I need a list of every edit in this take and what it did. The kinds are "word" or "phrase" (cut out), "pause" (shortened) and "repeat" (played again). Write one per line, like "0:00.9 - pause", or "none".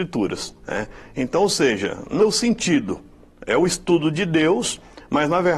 0:02.2 - word